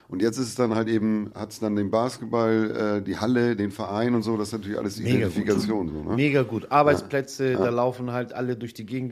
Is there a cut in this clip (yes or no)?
no